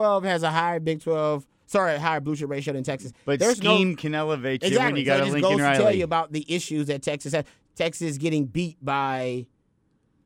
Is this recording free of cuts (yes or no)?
yes